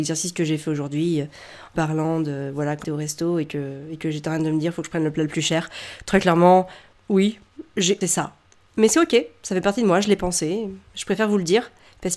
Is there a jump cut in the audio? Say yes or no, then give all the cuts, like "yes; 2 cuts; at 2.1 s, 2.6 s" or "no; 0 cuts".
yes; 3 cuts; at 1.7 s, 2.8 s, 8.0 s